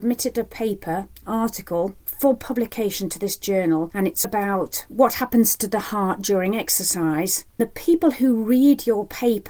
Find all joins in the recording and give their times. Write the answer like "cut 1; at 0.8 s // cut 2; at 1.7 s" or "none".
cut 1; at 1.2 s // cut 2; at 4.2 s // cut 3; at 7.6 s